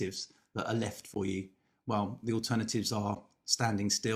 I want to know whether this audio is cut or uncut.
uncut